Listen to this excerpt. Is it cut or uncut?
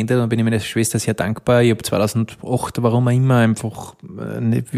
uncut